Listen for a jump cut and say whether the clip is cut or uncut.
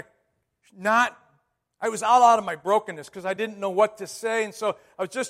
uncut